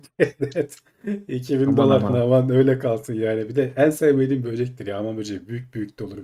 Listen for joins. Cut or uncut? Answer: cut